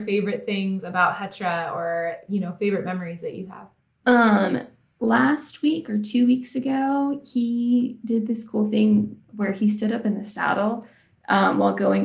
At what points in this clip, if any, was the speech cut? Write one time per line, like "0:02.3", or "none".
none